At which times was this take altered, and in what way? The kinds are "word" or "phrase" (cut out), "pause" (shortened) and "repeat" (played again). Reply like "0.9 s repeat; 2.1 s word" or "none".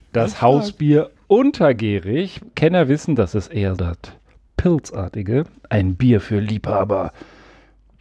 3.8 s word